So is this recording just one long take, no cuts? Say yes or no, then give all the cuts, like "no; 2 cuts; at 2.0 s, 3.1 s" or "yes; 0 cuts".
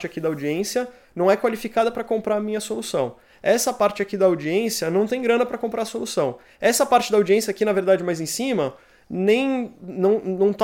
yes; 0 cuts